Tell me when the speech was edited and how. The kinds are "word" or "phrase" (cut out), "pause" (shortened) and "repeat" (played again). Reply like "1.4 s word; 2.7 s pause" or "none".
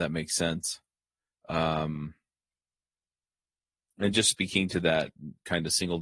none